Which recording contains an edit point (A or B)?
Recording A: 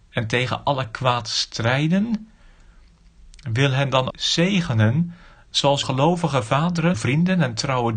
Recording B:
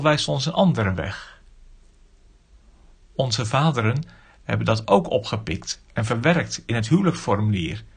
A